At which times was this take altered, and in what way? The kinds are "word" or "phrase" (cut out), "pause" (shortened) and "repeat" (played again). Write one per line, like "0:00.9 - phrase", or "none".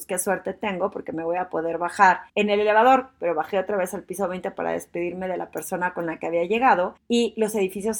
0:02.3 - pause
0:07.0 - pause